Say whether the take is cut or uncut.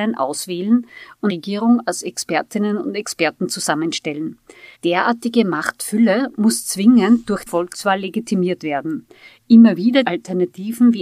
cut